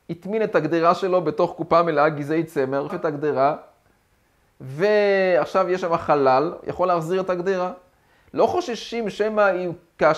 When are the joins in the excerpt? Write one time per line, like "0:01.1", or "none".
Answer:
0:02.9

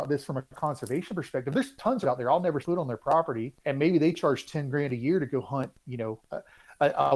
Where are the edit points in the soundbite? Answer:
0:02.0
0:02.6
0:03.6
0:06.3

